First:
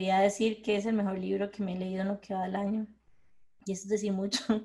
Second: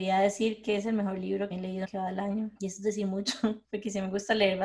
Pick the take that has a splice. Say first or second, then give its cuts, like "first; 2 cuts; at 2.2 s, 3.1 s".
second; 4 cuts; at 1.5 s, 1.8 s, 2.6 s, 3.6 s